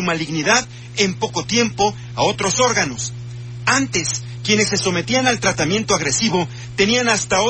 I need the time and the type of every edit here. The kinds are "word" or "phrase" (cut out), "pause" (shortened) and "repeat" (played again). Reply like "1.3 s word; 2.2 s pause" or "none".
none